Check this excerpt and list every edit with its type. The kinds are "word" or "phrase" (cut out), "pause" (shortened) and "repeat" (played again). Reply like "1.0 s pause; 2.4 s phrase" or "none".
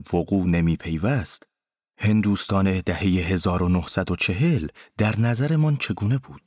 none

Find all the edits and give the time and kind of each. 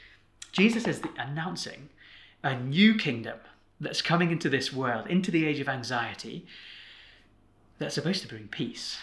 none

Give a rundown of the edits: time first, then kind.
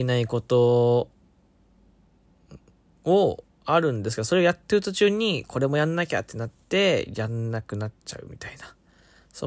8.0 s pause

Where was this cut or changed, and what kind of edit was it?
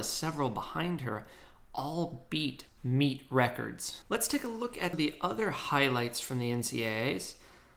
2.7 s word; 4.1 s pause; 4.9 s word

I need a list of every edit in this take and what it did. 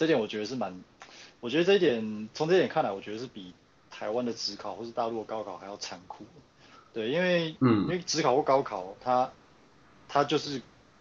none

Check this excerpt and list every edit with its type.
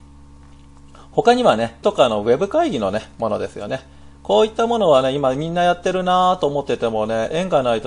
1.8 s word

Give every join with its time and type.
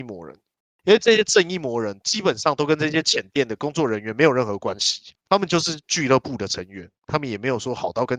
5.2 s pause

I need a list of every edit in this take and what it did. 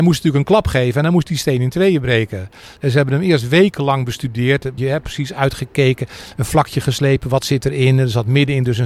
4.8 s word

